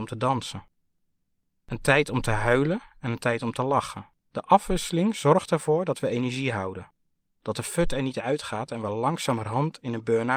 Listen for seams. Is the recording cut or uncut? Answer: cut